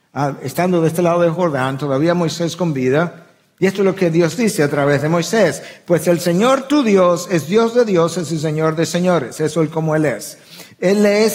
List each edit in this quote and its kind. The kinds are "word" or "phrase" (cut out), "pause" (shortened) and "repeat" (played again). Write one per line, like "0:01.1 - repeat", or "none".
none